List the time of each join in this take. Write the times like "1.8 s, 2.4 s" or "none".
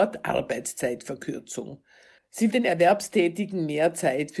2.5 s